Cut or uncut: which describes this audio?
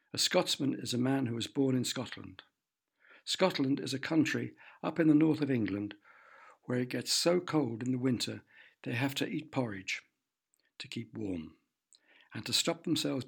uncut